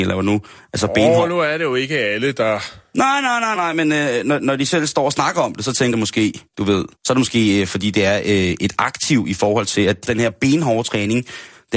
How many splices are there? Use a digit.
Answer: 5